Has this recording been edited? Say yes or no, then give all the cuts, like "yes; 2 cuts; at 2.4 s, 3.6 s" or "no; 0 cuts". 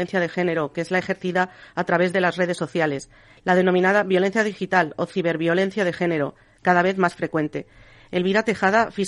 no; 0 cuts